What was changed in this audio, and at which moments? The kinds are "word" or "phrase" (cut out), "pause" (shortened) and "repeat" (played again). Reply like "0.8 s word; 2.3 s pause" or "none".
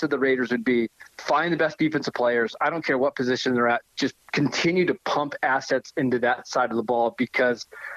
1.1 s pause; 4.2 s pause